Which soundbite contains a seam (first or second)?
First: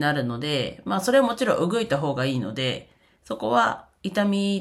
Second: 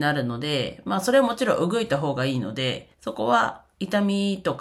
second